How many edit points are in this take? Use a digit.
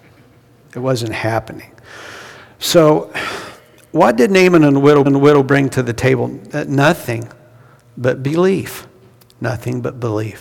1